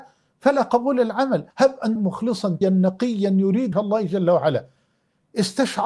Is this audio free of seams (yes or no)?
no